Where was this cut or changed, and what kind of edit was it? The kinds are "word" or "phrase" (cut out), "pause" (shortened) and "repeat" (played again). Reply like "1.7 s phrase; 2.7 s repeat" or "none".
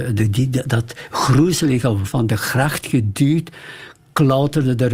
2.0 s word